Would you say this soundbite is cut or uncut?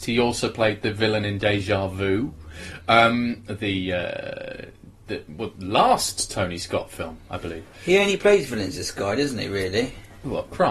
uncut